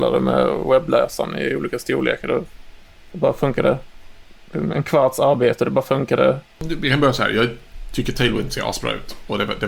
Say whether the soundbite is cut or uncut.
uncut